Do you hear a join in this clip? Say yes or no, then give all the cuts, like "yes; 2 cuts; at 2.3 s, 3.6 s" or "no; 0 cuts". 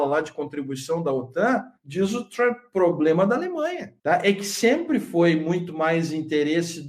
yes; 2 cuts; at 1.8 s, 4.0 s